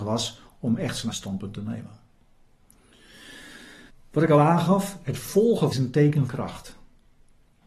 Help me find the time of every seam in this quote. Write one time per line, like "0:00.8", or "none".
0:01.1
0:03.9
0:05.7
0:06.3